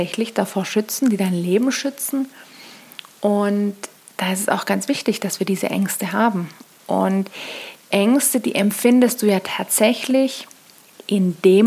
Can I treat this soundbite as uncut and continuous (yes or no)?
no